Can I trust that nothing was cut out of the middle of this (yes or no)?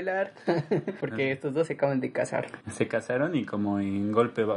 yes